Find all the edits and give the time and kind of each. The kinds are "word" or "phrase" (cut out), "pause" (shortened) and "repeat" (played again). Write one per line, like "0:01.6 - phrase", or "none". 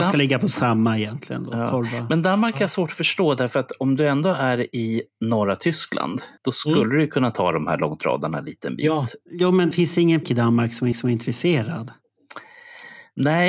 0:06.4 - pause
0:09.2 - pause
0:09.7 - word
0:10.2 - word
0:10.9 - repeat